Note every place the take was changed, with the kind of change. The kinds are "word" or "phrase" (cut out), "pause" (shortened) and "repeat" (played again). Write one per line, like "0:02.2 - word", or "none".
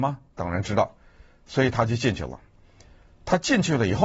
none